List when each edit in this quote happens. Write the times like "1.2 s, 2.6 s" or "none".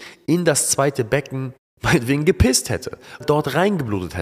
1.6 s, 3.2 s